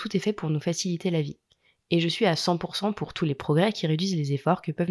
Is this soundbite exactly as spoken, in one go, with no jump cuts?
yes; 0 cuts

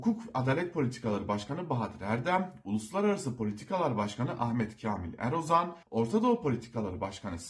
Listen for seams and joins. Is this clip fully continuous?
no; 1 cut; at 5.8 s

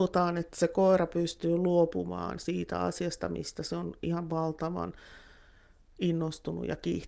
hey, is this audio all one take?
yes; 0 cuts

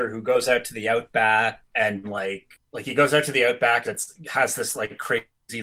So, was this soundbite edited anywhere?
yes; 2 cuts; at 2.0 s, 3.8 s

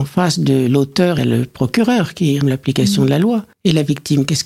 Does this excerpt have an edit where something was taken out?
yes; 3 cuts; at 1.2 s, 2.4 s, 3.5 s

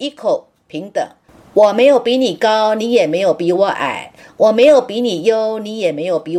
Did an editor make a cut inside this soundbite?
no; 0 cuts

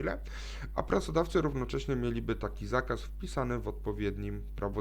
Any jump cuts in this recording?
no; 0 cuts

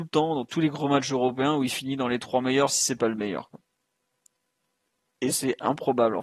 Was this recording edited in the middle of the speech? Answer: no; 0 cuts

